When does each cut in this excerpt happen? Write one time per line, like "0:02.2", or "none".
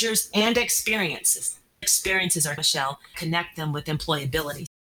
0:02.6
0:03.1